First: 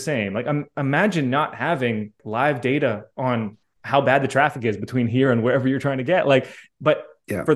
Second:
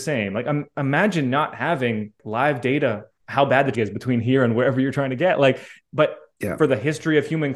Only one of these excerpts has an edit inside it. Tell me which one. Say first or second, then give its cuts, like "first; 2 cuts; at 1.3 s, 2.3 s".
second; 2 cuts; at 3.1 s, 3.7 s